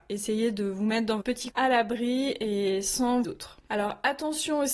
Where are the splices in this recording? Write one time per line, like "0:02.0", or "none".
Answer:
0:01.2
0:01.5
0:03.2